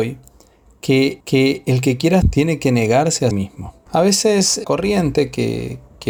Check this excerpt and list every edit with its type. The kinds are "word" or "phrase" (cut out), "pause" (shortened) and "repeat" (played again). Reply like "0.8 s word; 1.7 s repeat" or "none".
1.2 s repeat; 2.2 s word; 3.3 s word; 3.9 s pause; 4.6 s word